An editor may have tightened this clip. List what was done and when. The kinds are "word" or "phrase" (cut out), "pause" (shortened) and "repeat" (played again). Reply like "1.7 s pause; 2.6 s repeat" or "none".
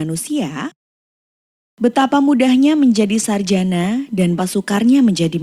4.4 s word